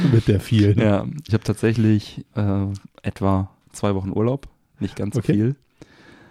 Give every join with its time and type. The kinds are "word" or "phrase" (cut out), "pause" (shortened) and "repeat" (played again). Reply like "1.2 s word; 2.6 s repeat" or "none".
1.3 s word